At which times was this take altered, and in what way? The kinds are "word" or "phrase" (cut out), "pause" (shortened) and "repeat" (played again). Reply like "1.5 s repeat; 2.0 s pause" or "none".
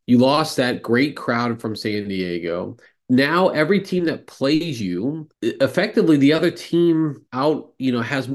2.9 s pause; 5.3 s pause; 7.3 s pause